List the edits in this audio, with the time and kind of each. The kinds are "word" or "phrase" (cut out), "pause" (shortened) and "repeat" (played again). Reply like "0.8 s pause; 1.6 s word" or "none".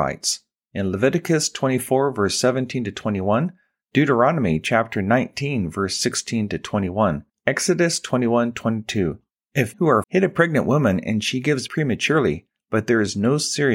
7.3 s pause; 9.7 s word; 10.0 s word; 11.7 s word